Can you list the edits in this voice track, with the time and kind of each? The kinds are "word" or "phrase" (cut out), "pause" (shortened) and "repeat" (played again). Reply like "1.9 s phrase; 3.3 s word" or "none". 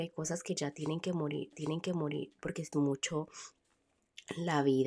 1.5 s repeat; 2.7 s word